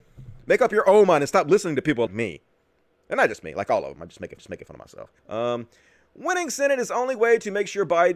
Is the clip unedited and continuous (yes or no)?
no